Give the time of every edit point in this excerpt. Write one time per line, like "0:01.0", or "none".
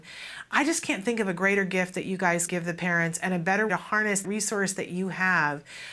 0:02.5
0:03.7
0:04.2